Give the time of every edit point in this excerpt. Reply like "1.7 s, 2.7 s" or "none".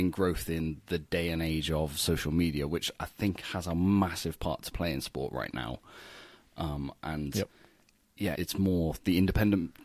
8.3 s